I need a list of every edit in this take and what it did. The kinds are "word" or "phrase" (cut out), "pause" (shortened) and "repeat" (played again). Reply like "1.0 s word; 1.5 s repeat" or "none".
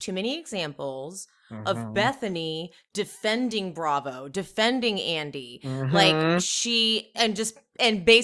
7.1 s word